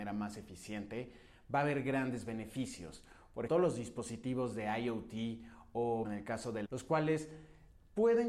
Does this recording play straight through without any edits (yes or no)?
no